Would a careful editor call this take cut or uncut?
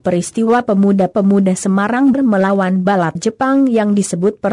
cut